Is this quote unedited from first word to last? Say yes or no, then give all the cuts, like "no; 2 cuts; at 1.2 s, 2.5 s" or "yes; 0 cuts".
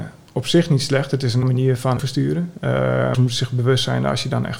no; 3 cuts; at 1.4 s, 2.0 s, 3.1 s